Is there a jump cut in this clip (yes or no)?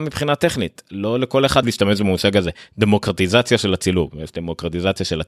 yes